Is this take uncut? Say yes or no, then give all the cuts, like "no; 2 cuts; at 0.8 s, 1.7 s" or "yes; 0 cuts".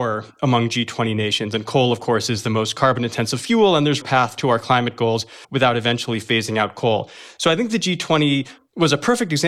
no; 2 cuts; at 4.0 s, 5.4 s